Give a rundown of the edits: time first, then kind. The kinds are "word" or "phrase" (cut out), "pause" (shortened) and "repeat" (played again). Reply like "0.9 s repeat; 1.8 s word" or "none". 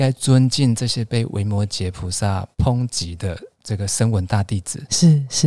2.5 s pause; 3.5 s pause

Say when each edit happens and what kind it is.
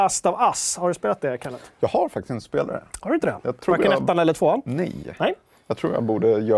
none

